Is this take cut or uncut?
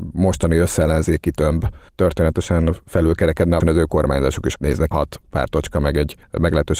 cut